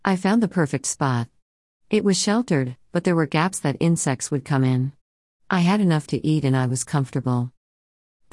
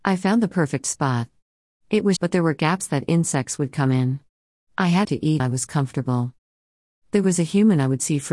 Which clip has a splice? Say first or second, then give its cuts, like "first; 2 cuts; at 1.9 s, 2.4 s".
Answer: second; 3 cuts; at 2.2 s, 5.0 s, 5.4 s